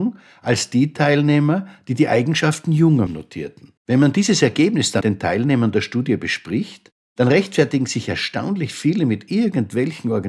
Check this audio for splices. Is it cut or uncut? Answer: cut